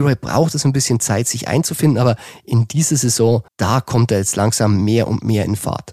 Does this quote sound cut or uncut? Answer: cut